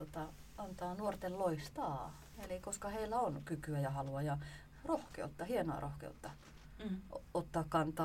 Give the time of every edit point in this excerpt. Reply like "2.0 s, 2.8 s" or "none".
none